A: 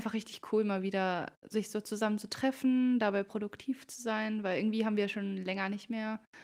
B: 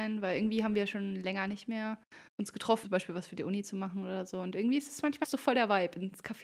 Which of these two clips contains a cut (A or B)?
B